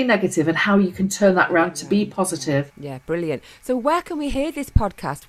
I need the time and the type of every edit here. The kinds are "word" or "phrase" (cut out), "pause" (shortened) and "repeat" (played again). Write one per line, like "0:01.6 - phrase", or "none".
0:02.7 - pause